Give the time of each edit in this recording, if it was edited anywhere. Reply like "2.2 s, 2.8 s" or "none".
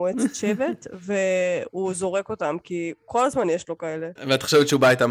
none